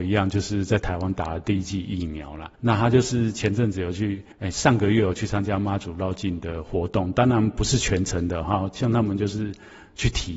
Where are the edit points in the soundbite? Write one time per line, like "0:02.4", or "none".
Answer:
0:02.5
0:04.3

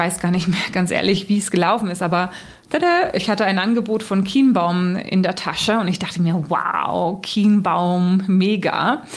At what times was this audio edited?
none

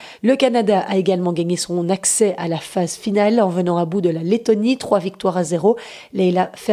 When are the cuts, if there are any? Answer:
none

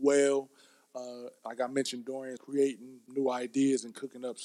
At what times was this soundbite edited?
0:02.4
0:03.1

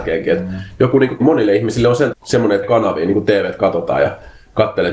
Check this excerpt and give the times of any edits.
0:01.2
0:02.1
0:02.6

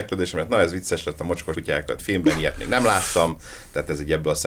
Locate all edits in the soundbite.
0:01.5
0:02.0

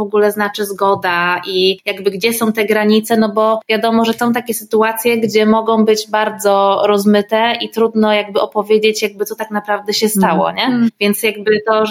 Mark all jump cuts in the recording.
0:04.2

